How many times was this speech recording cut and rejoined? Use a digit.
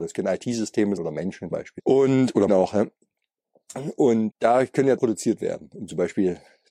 5